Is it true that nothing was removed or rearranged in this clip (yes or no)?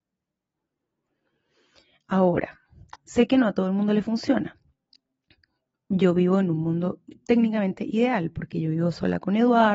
yes